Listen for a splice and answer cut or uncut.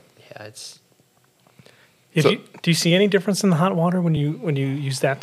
uncut